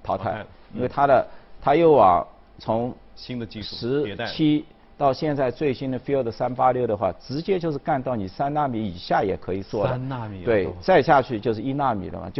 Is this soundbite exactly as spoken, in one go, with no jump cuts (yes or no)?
yes